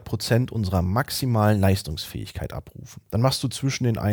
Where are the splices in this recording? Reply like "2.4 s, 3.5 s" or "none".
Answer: none